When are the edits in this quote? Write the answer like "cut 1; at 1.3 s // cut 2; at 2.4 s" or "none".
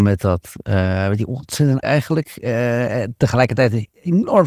cut 1; at 1.8 s